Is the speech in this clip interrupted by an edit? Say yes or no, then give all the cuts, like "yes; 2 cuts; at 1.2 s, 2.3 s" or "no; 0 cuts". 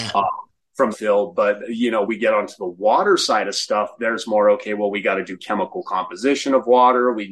yes; 3 cuts; at 0.9 s, 1.6 s, 2.0 s